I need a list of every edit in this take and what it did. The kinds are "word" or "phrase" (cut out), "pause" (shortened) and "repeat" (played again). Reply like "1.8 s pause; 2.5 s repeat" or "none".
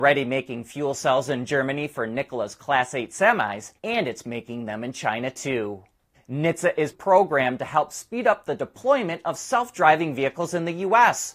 3.8 s pause; 6.1 s pause; 6.9 s phrase